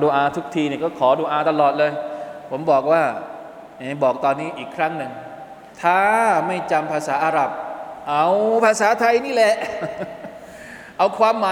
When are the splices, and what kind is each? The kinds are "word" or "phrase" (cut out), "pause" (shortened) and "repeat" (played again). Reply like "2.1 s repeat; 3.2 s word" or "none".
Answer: 5.7 s pause